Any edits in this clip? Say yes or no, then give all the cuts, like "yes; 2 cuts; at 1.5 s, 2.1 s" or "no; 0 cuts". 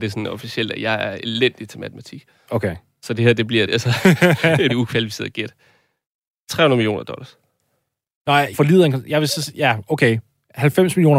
yes; 3 cuts; at 3.7 s, 4.7 s, 8.5 s